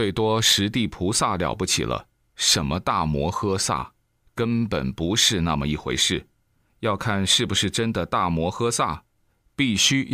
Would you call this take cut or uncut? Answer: uncut